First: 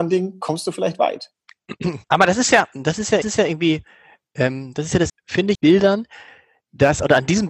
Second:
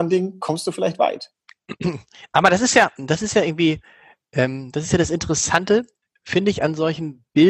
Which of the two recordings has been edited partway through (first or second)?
first